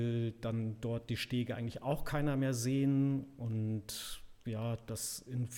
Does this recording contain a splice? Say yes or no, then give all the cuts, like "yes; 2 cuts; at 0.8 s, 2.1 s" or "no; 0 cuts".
no; 0 cuts